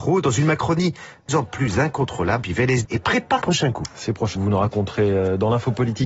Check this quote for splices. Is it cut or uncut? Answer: cut